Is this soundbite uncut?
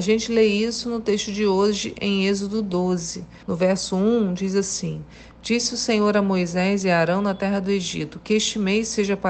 no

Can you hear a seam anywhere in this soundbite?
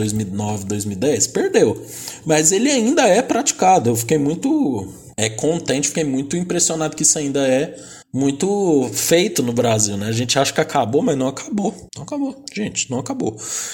yes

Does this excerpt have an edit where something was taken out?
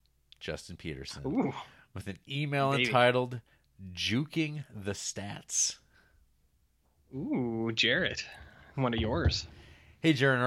no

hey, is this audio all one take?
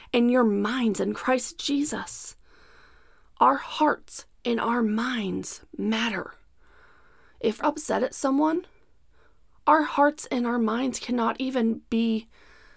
no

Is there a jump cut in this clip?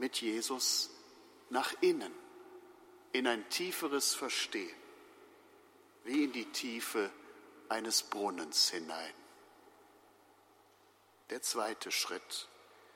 no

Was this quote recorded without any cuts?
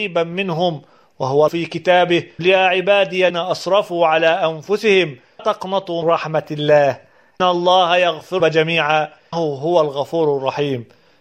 no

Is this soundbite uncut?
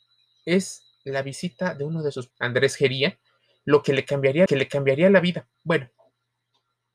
no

